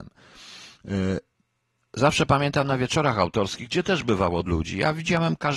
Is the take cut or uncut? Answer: cut